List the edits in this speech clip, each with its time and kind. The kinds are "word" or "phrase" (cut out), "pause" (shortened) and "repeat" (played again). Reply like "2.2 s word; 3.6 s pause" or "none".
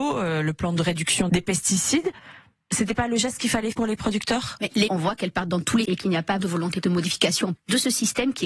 1.3 s word; 3.7 s word; 4.9 s word; 5.8 s word; 6.4 s word; 6.8 s word; 7.6 s word

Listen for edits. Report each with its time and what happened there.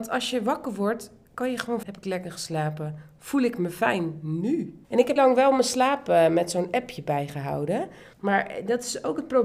1.8 s word; 4.8 s pause; 5.2 s word; 8.1 s pause

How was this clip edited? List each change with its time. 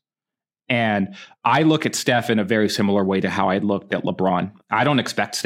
none

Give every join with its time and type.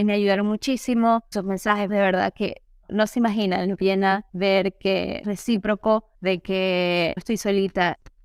1.3 s word; 1.9 s word; 2.9 s word; 3.8 s word; 4.3 s pause; 5.2 s word; 6.1 s pause; 7.2 s word

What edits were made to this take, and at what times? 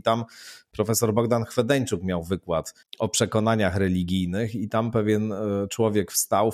2.8 s pause

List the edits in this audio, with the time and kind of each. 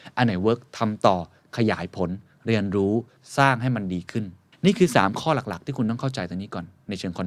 none

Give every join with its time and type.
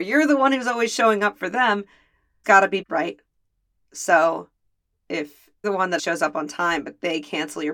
2.4 s word; 2.8 s word; 5.6 s word; 6.0 s word

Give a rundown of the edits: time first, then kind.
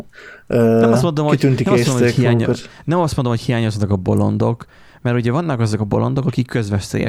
none

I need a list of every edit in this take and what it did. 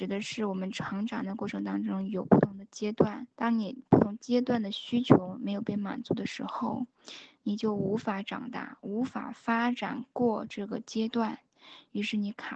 3.3 s pause

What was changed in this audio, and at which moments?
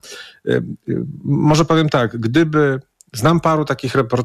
none

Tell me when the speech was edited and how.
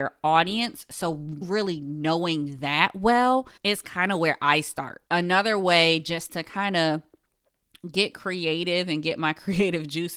1.4 s word; 3.6 s pause; 5.1 s pause

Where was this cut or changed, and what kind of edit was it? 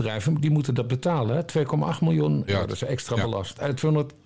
2.5 s word

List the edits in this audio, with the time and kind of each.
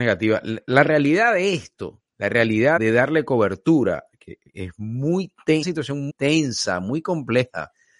2.8 s word; 4.5 s pause; 5.6 s word; 6.1 s word

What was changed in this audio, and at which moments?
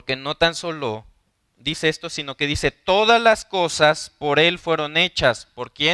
none

